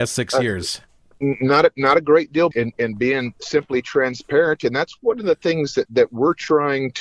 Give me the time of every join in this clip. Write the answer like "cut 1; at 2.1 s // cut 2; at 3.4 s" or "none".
cut 1; at 2.5 s // cut 2; at 5.9 s